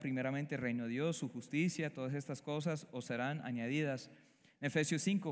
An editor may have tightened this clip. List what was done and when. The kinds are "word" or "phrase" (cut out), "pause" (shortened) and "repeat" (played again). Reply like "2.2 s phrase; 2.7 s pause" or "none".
none